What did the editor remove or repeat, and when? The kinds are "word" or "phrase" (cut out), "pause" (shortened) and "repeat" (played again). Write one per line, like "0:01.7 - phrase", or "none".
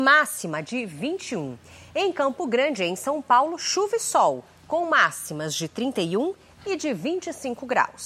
none